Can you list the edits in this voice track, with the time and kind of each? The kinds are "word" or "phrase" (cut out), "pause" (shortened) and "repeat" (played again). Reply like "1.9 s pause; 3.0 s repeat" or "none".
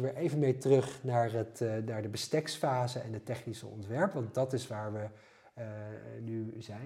none